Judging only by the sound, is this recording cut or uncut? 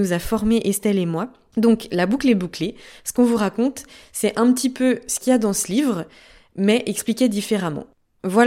uncut